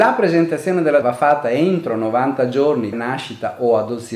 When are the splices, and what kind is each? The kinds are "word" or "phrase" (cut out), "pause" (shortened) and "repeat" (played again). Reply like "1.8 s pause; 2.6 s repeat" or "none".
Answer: 1.0 s word; 2.9 s word